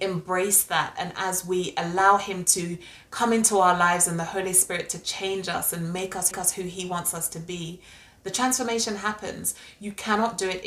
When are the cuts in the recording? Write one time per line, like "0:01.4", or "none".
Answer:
0:06.3